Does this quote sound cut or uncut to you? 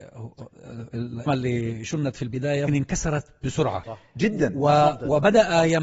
cut